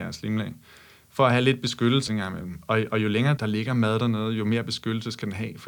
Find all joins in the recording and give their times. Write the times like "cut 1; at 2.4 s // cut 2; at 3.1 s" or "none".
cut 1; at 2.1 s // cut 2; at 3.4 s